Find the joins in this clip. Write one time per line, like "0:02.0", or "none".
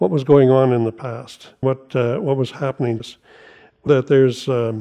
0:01.6
0:03.0
0:03.9

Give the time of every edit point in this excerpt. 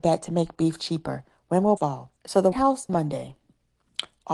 0:01.8
0:02.2
0:02.5
0:02.9

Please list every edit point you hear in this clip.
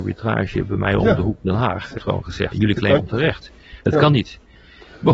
0:01.4
0:02.0
0:02.5
0:03.0

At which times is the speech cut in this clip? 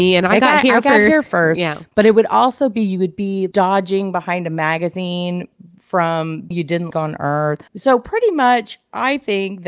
0:03.5
0:06.5
0:06.9
0:07.7

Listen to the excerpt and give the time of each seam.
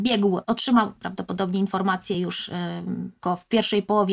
none

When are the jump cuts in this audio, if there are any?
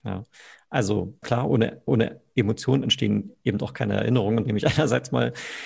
0:01.2
0:01.9
0:04.5

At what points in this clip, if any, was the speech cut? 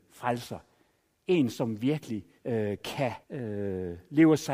0:02.4
0:03.2

